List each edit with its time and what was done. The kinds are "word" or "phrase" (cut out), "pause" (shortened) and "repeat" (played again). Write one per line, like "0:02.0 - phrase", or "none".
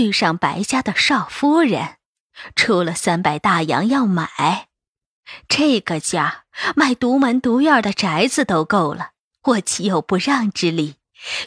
none